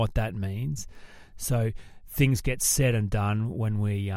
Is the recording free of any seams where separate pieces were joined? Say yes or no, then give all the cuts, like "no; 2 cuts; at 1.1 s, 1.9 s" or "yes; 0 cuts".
yes; 0 cuts